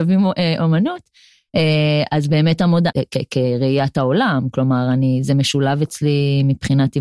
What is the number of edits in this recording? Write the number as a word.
one